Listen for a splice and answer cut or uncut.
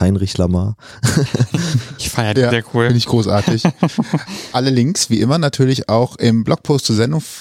cut